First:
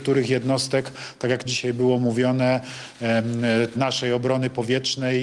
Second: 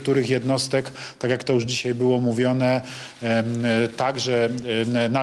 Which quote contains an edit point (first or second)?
first